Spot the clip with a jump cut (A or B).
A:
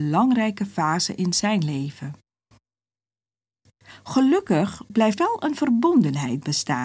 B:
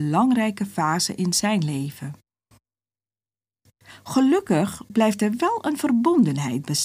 A